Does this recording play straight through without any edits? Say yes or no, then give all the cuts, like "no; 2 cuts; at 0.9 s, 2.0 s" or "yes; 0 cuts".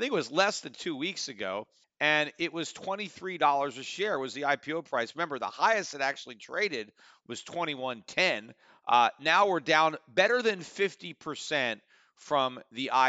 yes; 0 cuts